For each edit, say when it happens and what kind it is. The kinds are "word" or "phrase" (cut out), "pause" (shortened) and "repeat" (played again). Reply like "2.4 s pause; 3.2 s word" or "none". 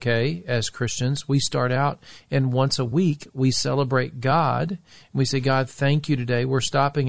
none

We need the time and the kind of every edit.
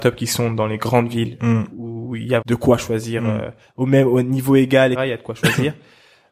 2.4 s word; 4.9 s word

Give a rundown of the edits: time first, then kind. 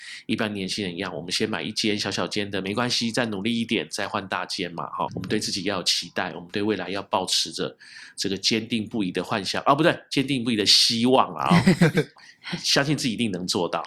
5.1 s word; 12.2 s word

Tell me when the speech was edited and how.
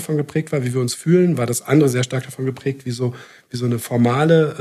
none

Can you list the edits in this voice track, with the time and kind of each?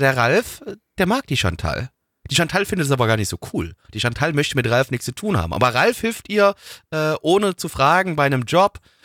none

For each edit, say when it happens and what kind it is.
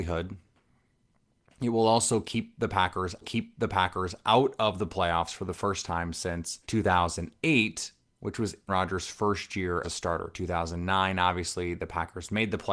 3.2 s repeat; 6.6 s pause; 8.7 s word; 9.8 s word

